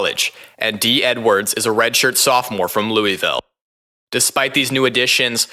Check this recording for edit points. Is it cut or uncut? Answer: uncut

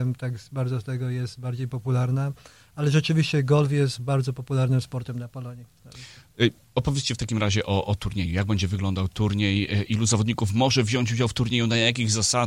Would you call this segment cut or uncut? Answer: uncut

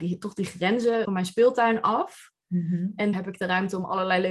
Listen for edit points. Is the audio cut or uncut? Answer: cut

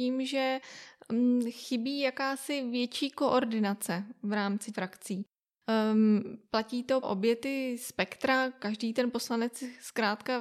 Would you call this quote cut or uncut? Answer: cut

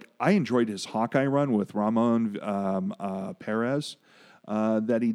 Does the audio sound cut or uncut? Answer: uncut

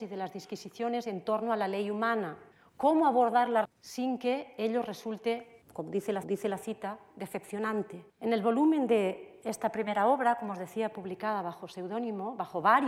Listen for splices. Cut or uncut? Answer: cut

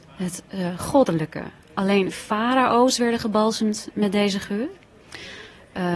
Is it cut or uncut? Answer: uncut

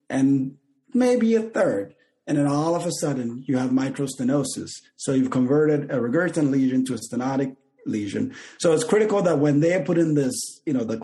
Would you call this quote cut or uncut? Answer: uncut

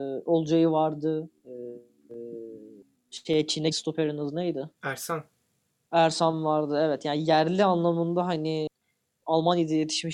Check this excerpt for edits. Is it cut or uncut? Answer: cut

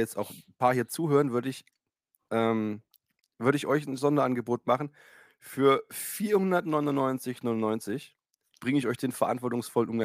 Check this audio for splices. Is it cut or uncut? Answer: uncut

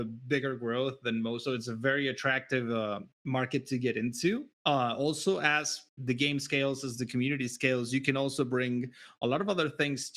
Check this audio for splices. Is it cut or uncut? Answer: cut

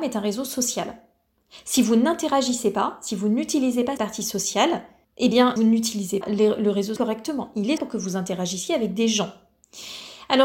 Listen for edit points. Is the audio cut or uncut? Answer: cut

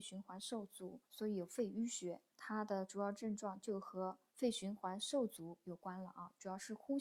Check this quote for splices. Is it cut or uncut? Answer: cut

